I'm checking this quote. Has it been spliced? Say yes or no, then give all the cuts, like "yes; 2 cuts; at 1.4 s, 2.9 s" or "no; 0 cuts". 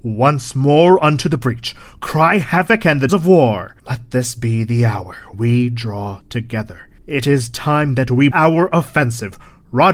yes; 6 cuts; at 3.1 s, 3.8 s, 5.3 s, 6.2 s, 7.0 s, 8.3 s